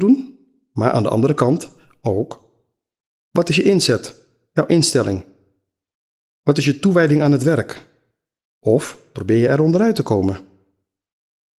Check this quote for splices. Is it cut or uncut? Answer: uncut